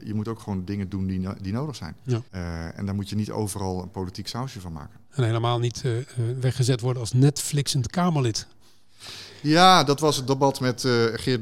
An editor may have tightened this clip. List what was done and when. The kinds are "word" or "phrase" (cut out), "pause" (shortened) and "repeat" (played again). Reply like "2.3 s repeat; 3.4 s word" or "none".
2.3 s pause